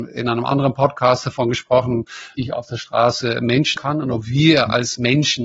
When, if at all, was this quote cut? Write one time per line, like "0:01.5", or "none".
0:02.3
0:03.8